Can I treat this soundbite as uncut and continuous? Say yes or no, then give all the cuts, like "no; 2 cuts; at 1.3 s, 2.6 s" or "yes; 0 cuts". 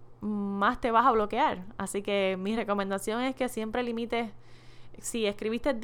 yes; 0 cuts